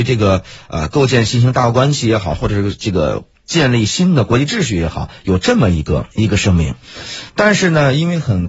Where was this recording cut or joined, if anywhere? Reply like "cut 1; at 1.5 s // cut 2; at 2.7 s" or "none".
cut 1; at 6.1 s